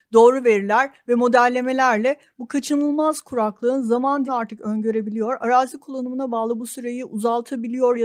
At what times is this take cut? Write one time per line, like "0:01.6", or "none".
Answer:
0:04.3